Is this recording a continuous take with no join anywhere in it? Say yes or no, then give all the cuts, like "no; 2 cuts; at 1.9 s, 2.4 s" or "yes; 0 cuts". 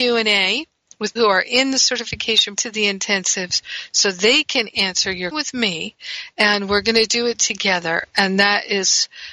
no; 3 cuts; at 1.2 s, 2.6 s, 5.3 s